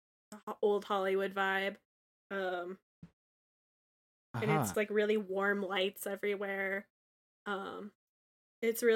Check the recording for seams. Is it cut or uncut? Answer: cut